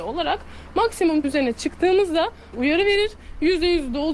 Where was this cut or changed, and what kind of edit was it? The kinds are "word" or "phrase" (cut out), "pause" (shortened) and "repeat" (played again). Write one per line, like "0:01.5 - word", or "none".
0:01.2 - word
0:02.5 - word